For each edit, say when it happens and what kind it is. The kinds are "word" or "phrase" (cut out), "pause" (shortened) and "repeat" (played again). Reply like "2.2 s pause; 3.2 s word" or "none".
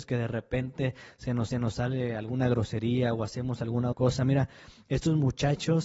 1.5 s repeat; 3.9 s word